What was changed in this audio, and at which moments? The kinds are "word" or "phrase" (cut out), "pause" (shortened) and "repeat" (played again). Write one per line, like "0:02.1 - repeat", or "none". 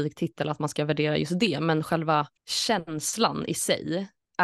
0:02.4 - pause